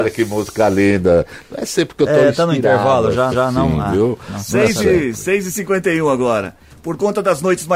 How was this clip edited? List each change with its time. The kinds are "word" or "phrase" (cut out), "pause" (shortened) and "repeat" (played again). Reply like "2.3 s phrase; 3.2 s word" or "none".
3.3 s repeat